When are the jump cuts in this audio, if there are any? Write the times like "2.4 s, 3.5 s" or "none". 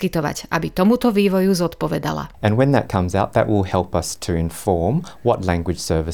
2.3 s